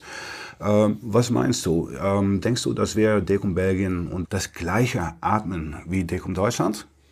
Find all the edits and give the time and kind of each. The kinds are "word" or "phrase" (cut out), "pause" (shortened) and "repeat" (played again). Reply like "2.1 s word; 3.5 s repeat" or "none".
4.2 s phrase

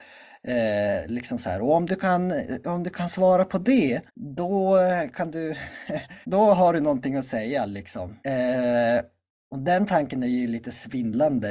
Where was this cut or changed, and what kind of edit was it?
4.1 s pause; 6.2 s pause; 8.2 s pause

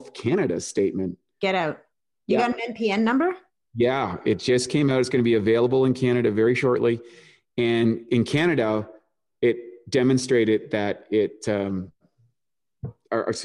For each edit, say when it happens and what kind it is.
none

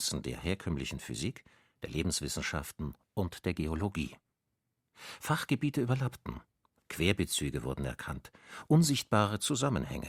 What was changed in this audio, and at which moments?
none

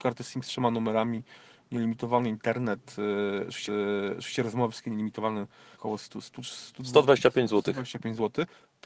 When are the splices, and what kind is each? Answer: 3.7 s repeat; 5.7 s phrase

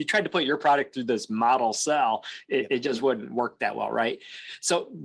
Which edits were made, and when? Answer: none

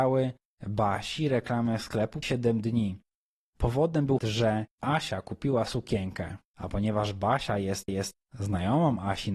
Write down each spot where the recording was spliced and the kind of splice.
2.2 s phrase; 4.2 s word; 4.7 s pause; 6.4 s pause; 7.9 s repeat

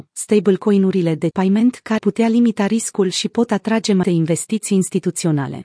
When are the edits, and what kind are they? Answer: 1.3 s word; 2.0 s word; 4.0 s word

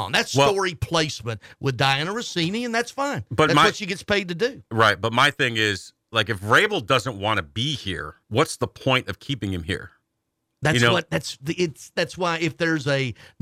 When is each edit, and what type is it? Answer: 8.2 s pause

